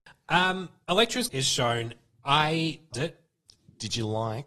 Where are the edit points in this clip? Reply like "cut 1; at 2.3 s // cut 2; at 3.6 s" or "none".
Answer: cut 1; at 1.3 s // cut 2; at 2.9 s